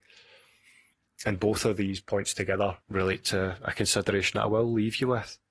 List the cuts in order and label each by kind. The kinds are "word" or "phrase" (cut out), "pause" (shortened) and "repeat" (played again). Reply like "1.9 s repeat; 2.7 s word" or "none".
2.8 s pause